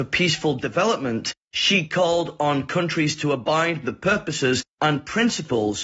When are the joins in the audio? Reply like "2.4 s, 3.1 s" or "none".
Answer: 3.8 s